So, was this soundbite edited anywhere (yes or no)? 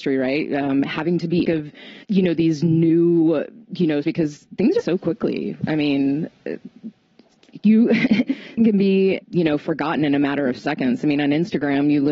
yes